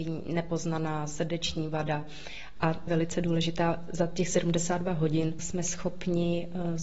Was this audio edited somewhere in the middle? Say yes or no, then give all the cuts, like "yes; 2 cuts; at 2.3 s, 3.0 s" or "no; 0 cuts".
yes; 1 cut; at 2.9 s